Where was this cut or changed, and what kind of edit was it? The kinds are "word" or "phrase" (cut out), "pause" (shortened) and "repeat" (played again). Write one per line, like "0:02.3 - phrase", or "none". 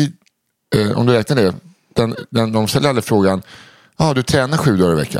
none